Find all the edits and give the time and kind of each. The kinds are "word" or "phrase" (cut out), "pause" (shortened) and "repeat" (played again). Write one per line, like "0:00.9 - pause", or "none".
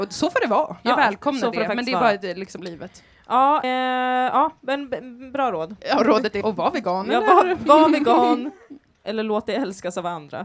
0:02.6 - phrase
0:03.6 - word
0:05.8 - pause
0:06.4 - word

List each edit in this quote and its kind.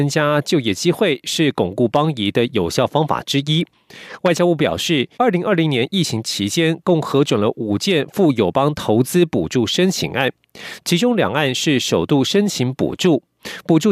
0:05.1 - pause

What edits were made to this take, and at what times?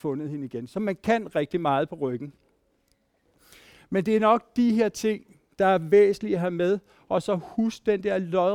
0:01.3 - word

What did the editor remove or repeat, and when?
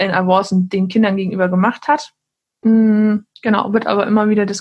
0:03.3 - pause

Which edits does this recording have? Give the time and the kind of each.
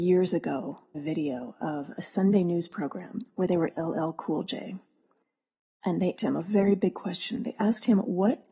0:00.9 - word
0:03.7 - word
0:06.2 - word

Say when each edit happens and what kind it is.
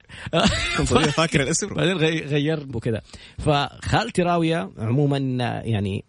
0:01.7 - word
0:02.7 - phrase

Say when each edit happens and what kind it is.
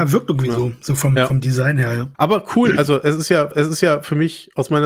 0:02.1 - pause
0:03.5 - repeat

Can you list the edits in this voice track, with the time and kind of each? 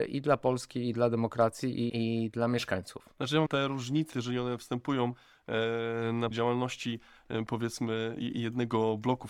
0:01.9 - word
0:03.5 - phrase
0:04.1 - word
0:06.3 - word

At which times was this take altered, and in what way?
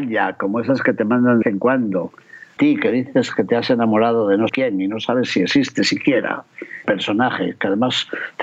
0:01.4 - word
0:02.6 - word
0:04.5 - word
0:06.8 - word

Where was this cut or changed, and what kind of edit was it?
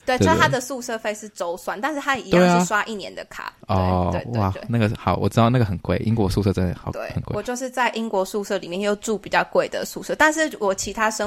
0:03.6 - pause

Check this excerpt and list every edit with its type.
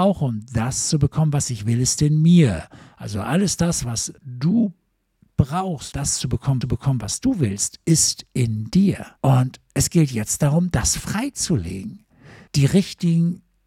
0:04.2 - pause
0:05.9 - word
0:06.6 - repeat
0:09.2 - pause
0:12.5 - pause

